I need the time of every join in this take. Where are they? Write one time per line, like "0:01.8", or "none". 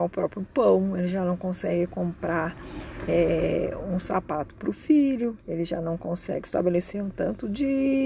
0:05.4